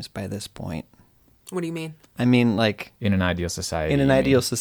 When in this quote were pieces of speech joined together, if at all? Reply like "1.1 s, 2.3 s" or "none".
none

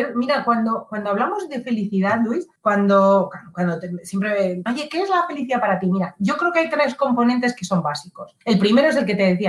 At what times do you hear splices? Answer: 2.6 s, 4.7 s, 8.4 s

